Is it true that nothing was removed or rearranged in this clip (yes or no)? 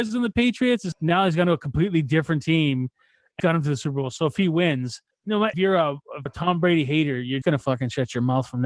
no